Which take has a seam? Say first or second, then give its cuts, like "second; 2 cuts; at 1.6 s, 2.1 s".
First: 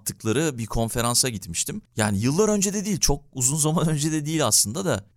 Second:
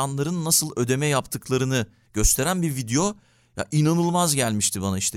first; 1 cut; at 1.8 s